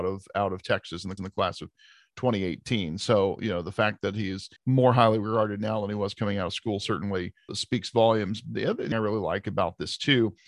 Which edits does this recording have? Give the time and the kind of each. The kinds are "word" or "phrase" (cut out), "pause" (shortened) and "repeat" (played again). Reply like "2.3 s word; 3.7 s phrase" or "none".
1.2 s repeat; 4.6 s pause; 7.5 s word; 8.9 s phrase

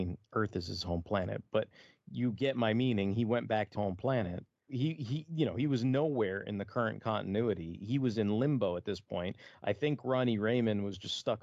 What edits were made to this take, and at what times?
3.7 s word; 4.7 s word

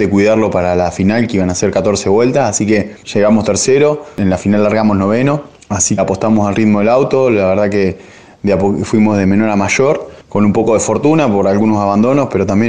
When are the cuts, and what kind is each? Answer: 3.0 s pause; 6.0 s word

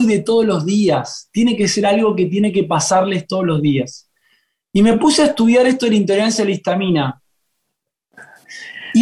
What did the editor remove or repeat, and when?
none

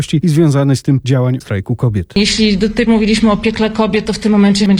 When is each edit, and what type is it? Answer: 1.0 s word; 1.4 s word; 2.9 s word

